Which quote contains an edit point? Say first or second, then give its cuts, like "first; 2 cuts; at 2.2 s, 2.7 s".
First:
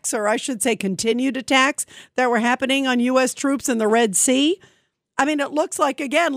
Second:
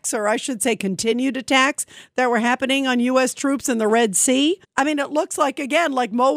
second; 1 cut; at 4.6 s